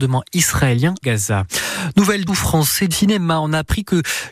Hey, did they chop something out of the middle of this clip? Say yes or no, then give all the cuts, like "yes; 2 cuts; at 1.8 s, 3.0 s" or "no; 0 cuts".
yes; 3 cuts; at 1.0 s, 2.3 s, 2.9 s